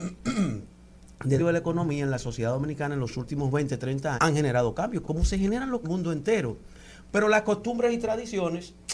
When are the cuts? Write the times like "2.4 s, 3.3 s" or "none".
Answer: 1.4 s, 4.2 s, 5.0 s, 5.8 s

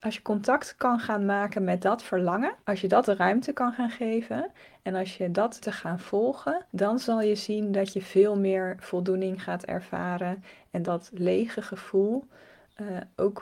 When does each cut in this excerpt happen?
2.6 s, 5.6 s, 6.7 s, 10.8 s

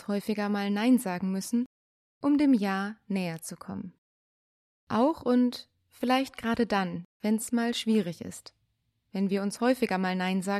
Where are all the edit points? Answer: none

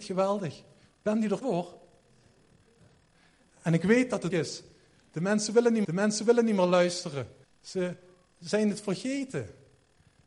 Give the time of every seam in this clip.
1.4 s, 4.3 s, 5.8 s, 7.4 s

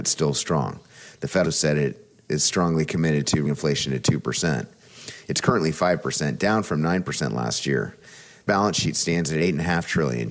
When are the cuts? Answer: 1.4 s, 3.5 s, 8.5 s

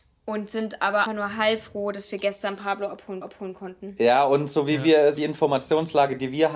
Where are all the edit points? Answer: 1.1 s, 3.2 s, 5.2 s

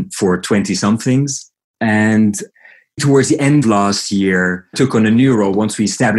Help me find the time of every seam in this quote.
3.0 s, 3.6 s, 4.7 s

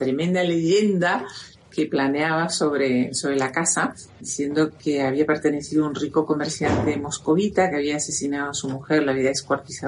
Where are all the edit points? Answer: none

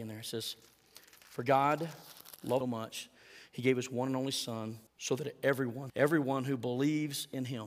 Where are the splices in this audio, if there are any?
2.6 s, 4.9 s, 5.9 s

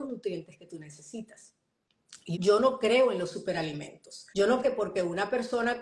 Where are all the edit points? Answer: 2.3 s, 4.3 s, 4.6 s

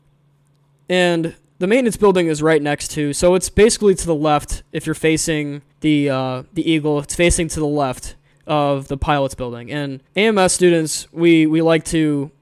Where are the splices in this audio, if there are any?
5.7 s, 8.3 s, 10.1 s

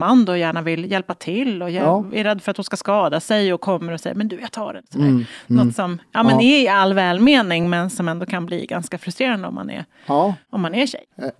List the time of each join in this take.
none

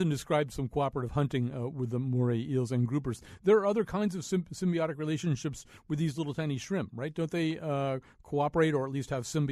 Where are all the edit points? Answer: none

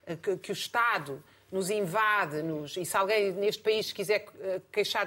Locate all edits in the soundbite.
none

